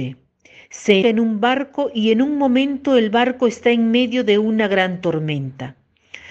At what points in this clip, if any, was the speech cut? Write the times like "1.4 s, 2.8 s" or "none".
1.0 s

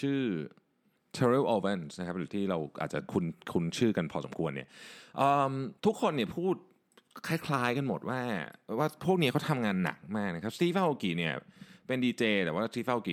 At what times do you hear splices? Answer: 2.3 s, 5.8 s

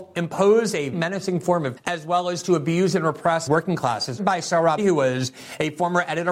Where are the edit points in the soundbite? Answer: 0.9 s, 1.8 s, 3.5 s, 4.2 s, 4.8 s

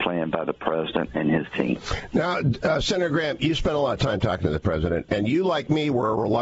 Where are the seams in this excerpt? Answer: none

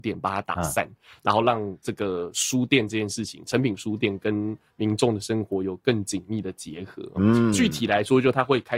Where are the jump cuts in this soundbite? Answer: none

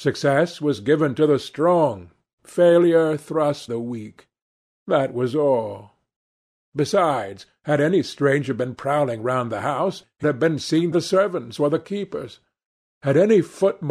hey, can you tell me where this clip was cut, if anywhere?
3.7 s, 10.2 s, 10.9 s

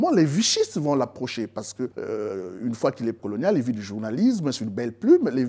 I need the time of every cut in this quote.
1.9 s, 3.2 s

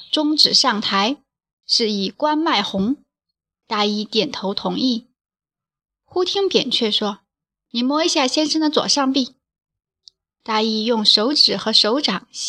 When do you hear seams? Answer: none

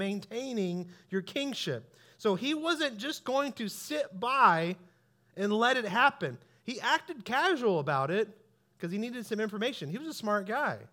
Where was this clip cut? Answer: none

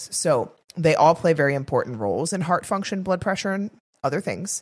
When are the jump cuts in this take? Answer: none

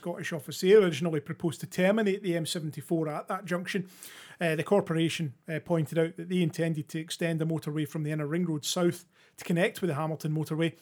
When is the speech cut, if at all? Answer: none

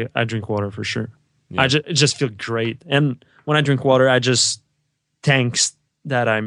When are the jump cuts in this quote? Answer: none

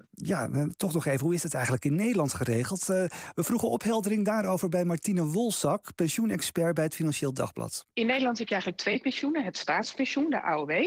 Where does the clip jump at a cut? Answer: 7.9 s

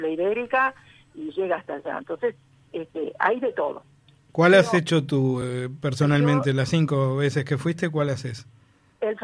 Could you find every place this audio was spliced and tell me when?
none

